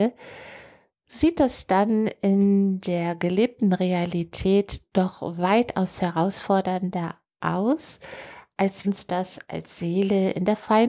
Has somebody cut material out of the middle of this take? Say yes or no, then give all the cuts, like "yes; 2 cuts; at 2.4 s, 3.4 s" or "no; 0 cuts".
yes; 1 cut; at 8.8 s